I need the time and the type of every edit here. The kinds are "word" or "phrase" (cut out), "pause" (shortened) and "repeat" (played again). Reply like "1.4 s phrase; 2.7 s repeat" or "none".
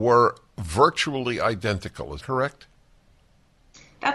2.2 s word